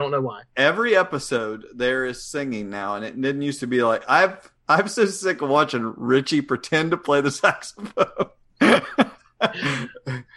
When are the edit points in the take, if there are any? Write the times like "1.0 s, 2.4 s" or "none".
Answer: none